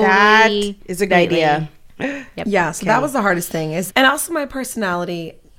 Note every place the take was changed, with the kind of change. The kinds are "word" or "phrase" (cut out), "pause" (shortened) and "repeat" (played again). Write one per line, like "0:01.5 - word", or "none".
0:01.1 - word
0:03.9 - word